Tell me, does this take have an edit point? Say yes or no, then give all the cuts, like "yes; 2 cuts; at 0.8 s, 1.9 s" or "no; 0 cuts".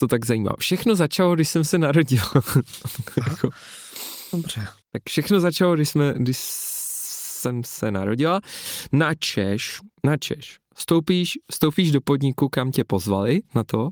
yes; 2 cuts; at 4.8 s, 9.9 s